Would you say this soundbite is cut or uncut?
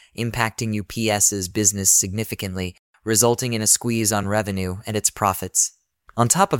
uncut